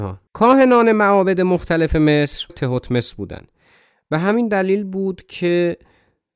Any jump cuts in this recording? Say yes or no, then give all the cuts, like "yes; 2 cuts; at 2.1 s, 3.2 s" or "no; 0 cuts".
yes; 1 cut; at 2.5 s